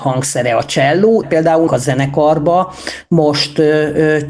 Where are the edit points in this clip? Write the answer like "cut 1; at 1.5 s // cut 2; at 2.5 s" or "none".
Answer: cut 1; at 1.2 s // cut 2; at 1.7 s